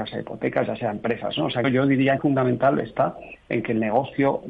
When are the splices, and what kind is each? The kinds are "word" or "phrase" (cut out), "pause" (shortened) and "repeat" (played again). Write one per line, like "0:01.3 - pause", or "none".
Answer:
0:01.6 - word
0:02.2 - phrase